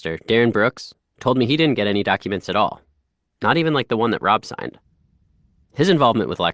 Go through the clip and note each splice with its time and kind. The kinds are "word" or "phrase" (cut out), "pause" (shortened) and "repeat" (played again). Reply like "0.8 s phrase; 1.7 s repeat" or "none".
none